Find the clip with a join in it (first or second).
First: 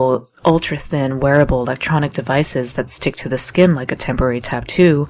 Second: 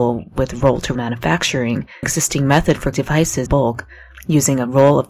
second